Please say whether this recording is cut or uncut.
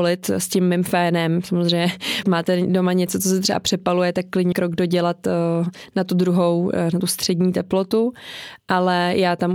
cut